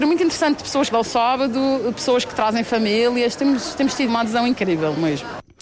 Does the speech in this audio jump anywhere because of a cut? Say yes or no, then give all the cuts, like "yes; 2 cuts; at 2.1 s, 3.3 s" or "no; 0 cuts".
yes; 2 cuts; at 0.9 s, 4.1 s